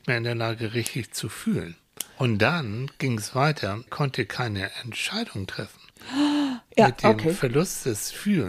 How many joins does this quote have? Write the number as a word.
three